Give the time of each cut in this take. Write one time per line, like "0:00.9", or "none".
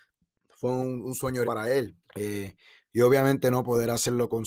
0:01.4
0:02.0